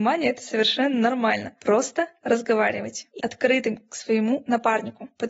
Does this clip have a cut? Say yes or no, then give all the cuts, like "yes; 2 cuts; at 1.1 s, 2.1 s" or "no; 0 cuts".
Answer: yes; 1 cut; at 3.2 s